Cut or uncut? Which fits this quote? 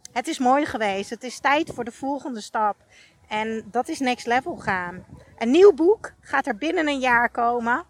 uncut